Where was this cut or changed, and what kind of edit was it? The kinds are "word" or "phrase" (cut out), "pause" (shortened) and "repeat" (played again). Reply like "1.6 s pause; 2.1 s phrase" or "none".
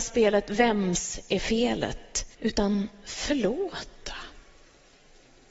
2.3 s pause